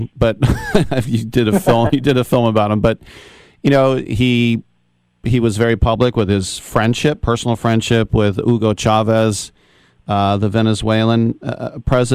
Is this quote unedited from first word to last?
yes; 0 cuts

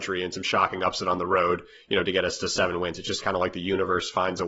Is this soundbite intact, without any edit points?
yes; 0 cuts

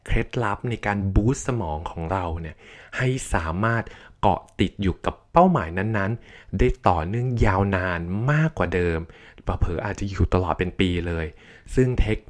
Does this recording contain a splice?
no; 0 cuts

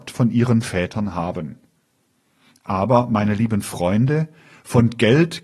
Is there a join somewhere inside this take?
no; 0 cuts

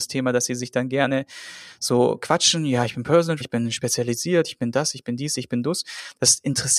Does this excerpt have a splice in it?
yes; 1 cut; at 3.4 s

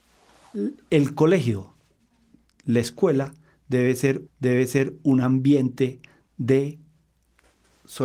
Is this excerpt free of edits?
no; 1 cut; at 4.3 s

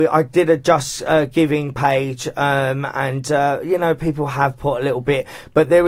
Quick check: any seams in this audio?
no; 0 cuts

